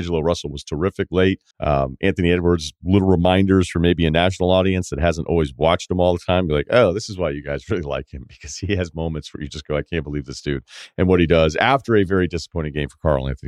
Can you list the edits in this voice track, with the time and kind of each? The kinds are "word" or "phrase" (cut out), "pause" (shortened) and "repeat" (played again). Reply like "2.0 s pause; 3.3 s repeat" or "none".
1.5 s pause